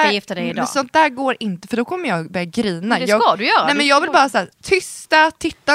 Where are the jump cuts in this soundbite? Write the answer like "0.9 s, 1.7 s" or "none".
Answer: 4.5 s